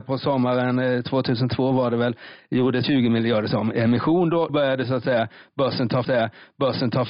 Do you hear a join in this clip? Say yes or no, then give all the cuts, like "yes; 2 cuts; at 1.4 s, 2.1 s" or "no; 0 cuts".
yes; 3 cuts; at 2.8 s, 4.5 s, 6.0 s